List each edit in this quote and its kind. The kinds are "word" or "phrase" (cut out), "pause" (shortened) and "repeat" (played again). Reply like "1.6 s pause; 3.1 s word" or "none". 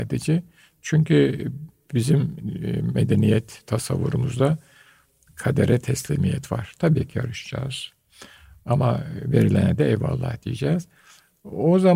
none